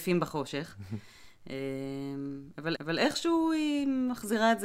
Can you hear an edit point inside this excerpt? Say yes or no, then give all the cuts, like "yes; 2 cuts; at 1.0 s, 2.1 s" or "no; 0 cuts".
yes; 1 cut; at 2.7 s